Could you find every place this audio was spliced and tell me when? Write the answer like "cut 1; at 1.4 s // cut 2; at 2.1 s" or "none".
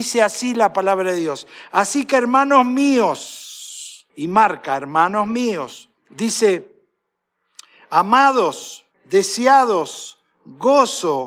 cut 1; at 4.1 s // cut 2; at 6.0 s // cut 3; at 8.9 s

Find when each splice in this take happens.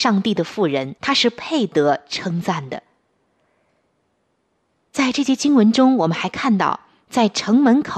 cut 1; at 1.0 s

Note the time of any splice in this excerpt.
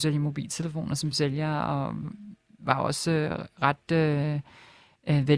none

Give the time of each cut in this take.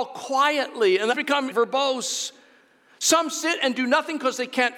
cut 1; at 1.1 s // cut 2; at 1.5 s

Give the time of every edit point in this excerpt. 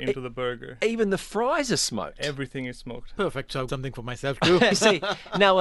cut 1; at 3.7 s // cut 2; at 4.7 s

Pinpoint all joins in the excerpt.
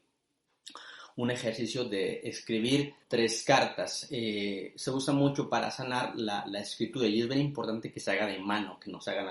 cut 1; at 3.0 s

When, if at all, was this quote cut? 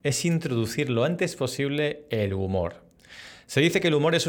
none

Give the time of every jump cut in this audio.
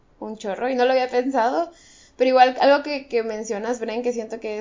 none

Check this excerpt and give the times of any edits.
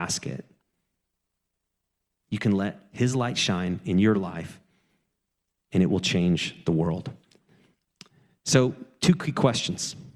none

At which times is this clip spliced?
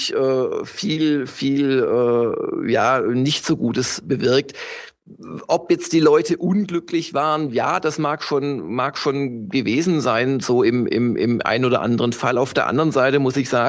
none

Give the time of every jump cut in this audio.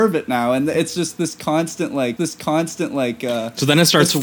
cut 1; at 2.2 s

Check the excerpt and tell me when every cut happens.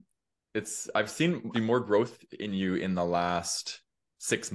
cut 1; at 1.5 s

